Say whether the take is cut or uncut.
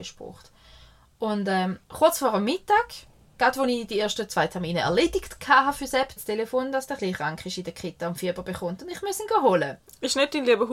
cut